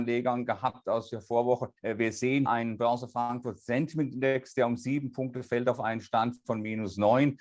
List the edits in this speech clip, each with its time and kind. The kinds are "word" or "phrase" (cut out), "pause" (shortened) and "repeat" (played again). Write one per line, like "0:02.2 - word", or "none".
0:01.8 - pause
0:02.5 - word